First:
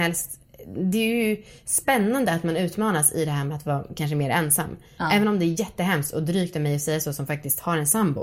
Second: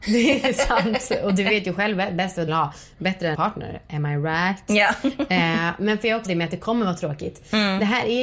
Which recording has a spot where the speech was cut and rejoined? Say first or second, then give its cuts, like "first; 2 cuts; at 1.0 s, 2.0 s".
second; 3 cuts; at 2.5 s, 3.3 s, 6.3 s